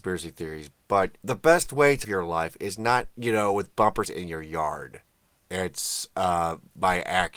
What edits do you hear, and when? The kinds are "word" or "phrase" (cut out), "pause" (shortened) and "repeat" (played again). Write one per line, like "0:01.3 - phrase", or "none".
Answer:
0:01.2 - pause
0:02.0 - word
0:03.1 - pause
0:04.0 - phrase